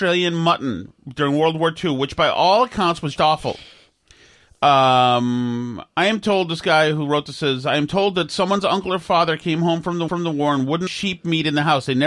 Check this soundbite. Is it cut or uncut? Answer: cut